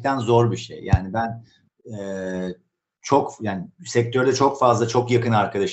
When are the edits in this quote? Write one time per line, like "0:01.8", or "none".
none